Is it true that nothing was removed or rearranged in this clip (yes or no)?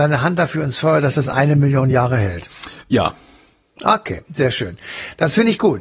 yes